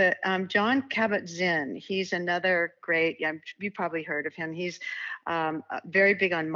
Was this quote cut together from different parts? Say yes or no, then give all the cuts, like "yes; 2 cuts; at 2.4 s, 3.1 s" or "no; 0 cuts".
no; 0 cuts